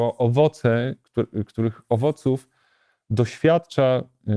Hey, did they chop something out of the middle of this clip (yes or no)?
no